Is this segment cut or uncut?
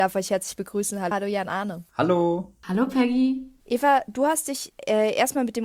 cut